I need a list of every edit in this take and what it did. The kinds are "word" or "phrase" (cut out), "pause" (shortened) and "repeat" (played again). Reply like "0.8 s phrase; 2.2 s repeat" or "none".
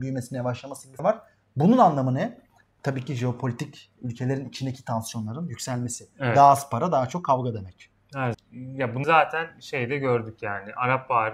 1.0 s word; 4.0 s word; 8.3 s word; 9.0 s word